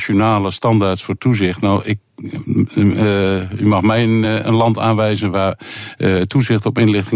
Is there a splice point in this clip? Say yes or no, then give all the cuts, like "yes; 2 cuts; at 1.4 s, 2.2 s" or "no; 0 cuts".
no; 0 cuts